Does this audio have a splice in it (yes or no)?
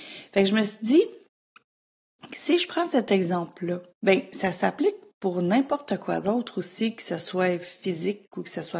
yes